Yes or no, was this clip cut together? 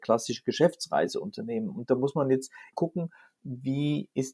yes